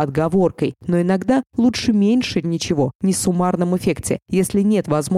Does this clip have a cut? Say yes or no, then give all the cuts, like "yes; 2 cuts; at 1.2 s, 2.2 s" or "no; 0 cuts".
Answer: yes; 2 cuts; at 2.4 s, 3.1 s